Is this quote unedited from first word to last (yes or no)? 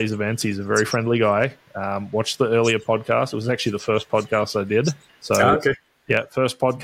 yes